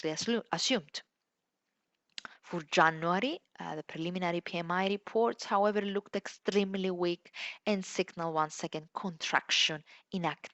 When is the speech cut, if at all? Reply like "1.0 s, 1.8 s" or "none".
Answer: 2.4 s